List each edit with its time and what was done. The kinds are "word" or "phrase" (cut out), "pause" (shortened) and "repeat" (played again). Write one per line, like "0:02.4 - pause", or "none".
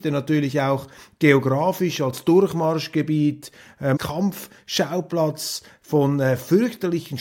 0:04.0 - phrase

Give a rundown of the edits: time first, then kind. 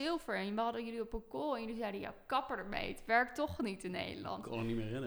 none

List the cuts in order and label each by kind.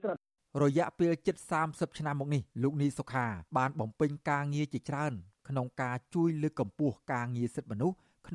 0:02.5 - pause
0:03.5 - pause

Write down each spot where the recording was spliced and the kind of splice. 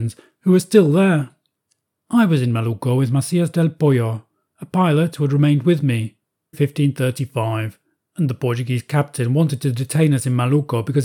0:06.5 - phrase

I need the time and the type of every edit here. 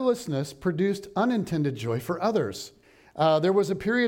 0:02.8 - pause

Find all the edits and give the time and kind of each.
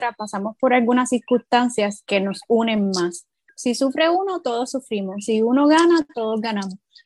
none

